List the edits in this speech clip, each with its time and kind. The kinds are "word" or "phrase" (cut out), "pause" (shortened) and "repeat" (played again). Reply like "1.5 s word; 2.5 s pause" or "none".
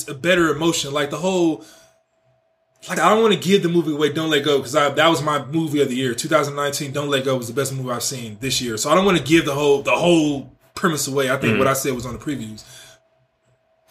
3.0 s word